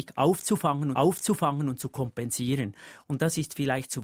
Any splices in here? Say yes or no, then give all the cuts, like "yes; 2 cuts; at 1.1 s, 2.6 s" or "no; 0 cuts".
yes; 1 cut; at 0.9 s